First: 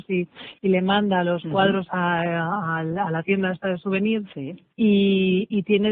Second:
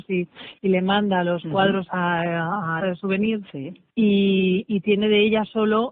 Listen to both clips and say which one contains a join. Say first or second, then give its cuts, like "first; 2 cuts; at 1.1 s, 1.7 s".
second; 1 cut; at 2.8 s